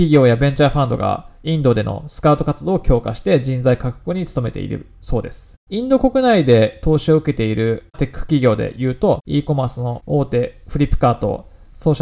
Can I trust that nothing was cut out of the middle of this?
no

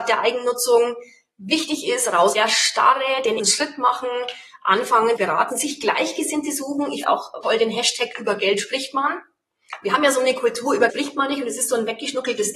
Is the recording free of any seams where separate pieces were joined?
no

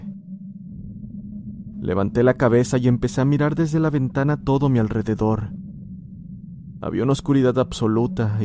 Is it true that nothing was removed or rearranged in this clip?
yes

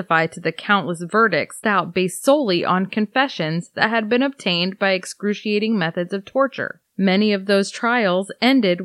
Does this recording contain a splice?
yes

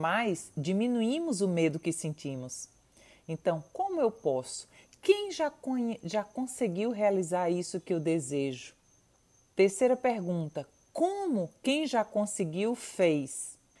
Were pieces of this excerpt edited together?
no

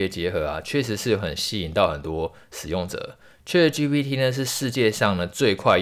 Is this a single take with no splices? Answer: yes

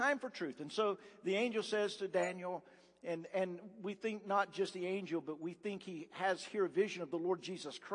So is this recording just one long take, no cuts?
yes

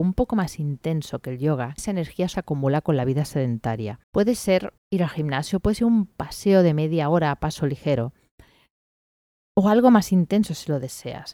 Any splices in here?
yes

